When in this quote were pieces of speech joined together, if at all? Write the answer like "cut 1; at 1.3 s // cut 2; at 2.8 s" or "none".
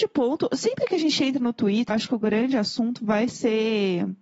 cut 1; at 1.9 s